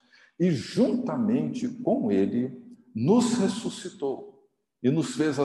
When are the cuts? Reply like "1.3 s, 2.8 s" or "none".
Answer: none